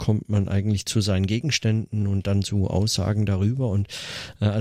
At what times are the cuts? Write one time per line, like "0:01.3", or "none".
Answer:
none